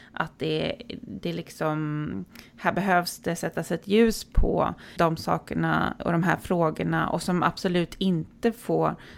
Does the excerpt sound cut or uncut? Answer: cut